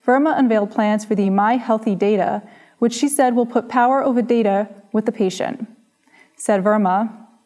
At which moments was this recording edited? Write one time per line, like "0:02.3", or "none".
none

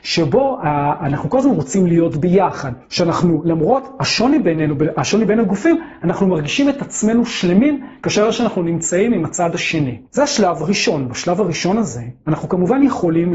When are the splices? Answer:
0:02.8
0:10.1

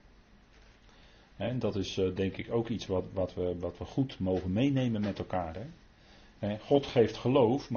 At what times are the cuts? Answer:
none

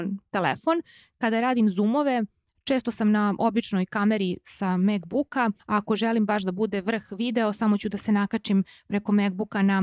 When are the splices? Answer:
0:05.6

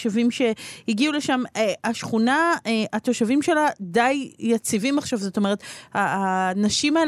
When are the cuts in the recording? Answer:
none

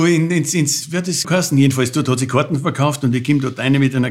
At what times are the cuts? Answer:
0:01.2

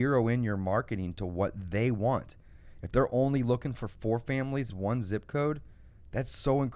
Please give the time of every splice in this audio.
0:04.7

